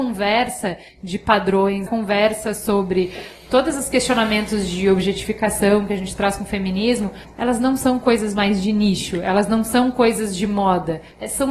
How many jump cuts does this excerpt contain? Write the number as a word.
one